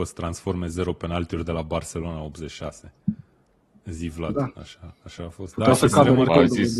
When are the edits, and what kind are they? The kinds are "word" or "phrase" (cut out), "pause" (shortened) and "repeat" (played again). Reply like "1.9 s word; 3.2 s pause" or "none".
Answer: none